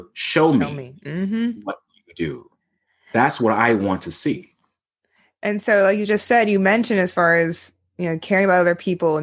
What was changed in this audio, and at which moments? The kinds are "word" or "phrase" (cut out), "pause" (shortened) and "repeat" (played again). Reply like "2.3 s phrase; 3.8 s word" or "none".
none